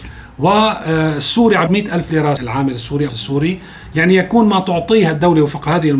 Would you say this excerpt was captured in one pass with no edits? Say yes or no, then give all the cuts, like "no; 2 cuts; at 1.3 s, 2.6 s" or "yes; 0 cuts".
no; 3 cuts; at 1.7 s, 2.4 s, 3.1 s